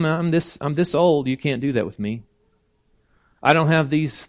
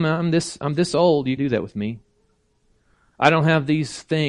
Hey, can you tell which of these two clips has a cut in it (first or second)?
second